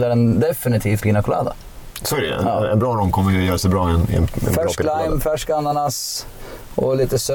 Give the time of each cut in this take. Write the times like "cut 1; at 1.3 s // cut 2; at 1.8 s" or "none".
cut 1; at 1.0 s